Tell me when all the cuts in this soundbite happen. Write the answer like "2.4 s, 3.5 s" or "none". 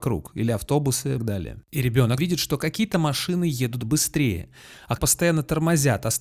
1.2 s, 2.2 s, 5.0 s